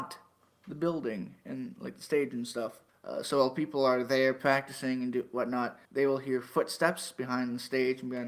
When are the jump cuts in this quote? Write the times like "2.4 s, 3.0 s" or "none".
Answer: 2.9 s, 5.8 s

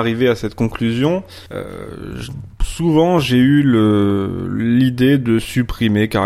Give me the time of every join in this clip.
1.5 s

